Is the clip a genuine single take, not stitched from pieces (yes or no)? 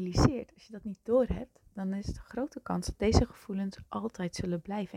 yes